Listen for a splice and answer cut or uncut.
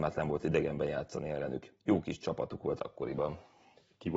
uncut